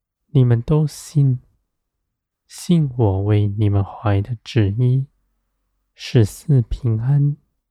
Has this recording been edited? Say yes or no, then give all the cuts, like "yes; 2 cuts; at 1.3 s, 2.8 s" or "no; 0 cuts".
no; 0 cuts